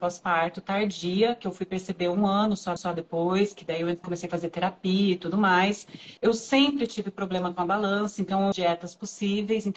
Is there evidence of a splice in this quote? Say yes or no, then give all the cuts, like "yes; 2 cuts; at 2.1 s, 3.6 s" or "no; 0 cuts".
yes; 4 cuts; at 2.8 s, 4.0 s, 6.2 s, 8.5 s